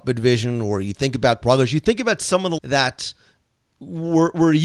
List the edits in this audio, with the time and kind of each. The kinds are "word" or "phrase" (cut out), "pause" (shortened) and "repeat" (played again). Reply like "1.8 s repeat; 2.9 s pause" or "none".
1.4 s word; 2.6 s word